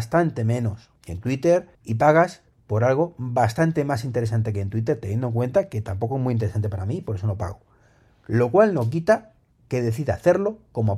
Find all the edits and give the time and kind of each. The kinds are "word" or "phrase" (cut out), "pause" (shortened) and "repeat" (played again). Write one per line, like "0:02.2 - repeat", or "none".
0:01.0 - pause
0:01.7 - pause